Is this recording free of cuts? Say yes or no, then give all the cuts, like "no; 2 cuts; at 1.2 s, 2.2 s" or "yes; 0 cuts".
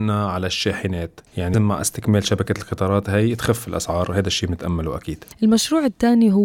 no; 1 cut; at 1.5 s